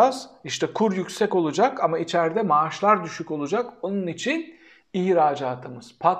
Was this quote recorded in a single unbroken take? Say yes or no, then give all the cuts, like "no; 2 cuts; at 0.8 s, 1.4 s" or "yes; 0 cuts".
yes; 0 cuts